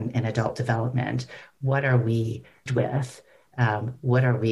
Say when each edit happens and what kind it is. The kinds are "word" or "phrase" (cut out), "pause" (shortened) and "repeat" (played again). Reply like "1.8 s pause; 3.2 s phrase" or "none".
2.7 s word